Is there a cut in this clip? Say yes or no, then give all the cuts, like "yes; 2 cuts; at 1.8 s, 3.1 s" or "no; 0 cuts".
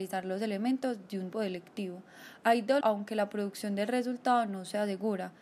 yes; 2 cuts; at 1.3 s, 2.8 s